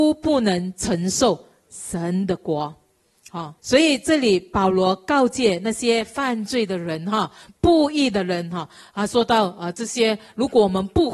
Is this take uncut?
no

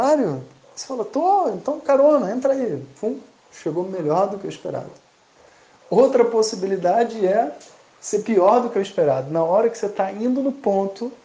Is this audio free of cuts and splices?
yes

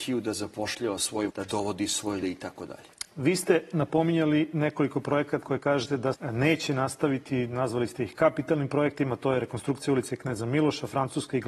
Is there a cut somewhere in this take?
yes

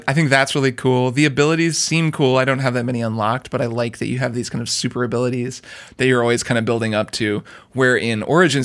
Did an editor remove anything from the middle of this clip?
no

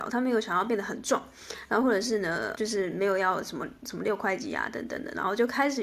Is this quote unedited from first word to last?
no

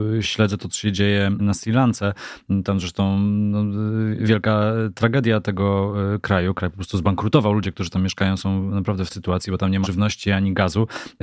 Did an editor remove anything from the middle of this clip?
yes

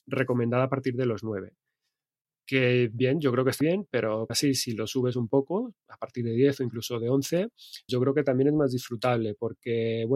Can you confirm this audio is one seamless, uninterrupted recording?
no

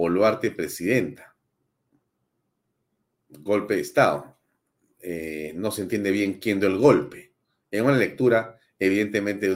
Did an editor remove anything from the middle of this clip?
no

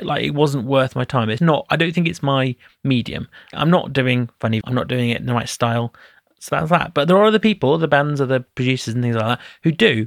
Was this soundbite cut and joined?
yes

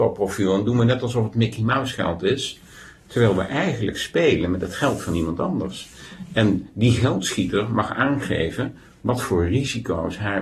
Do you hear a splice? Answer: no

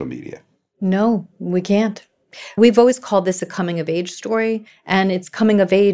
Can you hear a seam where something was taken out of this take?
no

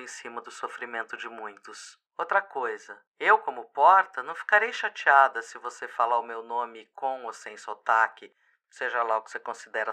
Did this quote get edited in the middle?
yes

